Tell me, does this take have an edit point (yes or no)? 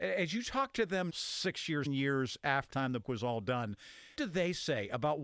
yes